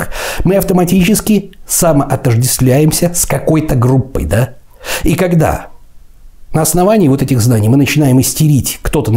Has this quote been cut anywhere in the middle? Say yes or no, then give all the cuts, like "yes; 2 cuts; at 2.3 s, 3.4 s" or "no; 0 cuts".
no; 0 cuts